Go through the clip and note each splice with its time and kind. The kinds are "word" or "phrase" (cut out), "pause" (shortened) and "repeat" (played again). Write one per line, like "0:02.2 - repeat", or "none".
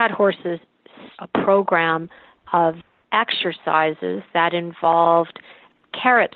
0:01.2 - word